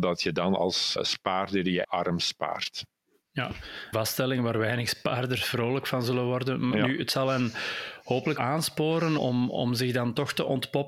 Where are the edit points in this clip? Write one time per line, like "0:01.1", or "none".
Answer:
0:01.0
0:01.8
0:03.9
0:08.4
0:09.2